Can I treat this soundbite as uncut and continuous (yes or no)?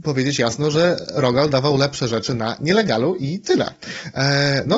yes